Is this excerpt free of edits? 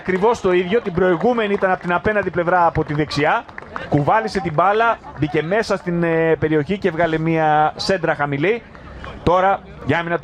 yes; 0 cuts

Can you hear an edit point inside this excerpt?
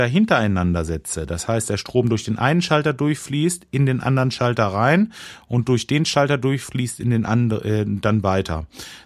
no; 0 cuts

